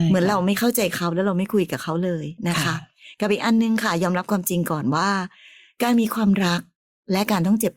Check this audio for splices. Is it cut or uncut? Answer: uncut